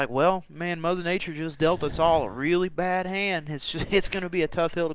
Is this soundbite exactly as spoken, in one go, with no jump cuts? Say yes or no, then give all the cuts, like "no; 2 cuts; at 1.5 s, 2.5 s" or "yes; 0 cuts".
yes; 0 cuts